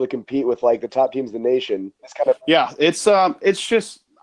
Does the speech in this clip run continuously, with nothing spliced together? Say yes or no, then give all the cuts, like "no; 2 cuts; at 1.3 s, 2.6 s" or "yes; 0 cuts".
no; 1 cut; at 2.0 s